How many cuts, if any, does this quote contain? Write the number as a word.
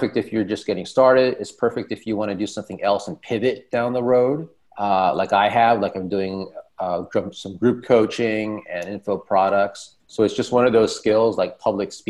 two